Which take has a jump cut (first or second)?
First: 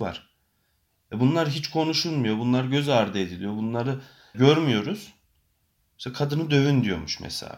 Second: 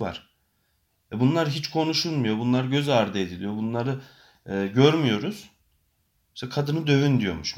first